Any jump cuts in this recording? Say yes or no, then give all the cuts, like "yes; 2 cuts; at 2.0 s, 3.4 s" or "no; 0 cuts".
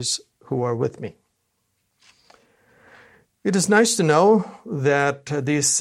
no; 0 cuts